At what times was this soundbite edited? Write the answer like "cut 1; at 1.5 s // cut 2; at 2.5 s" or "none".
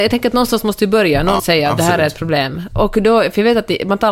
cut 1; at 1.4 s